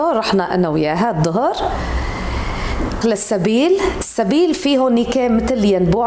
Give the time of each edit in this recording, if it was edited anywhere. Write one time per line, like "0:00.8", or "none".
0:03.0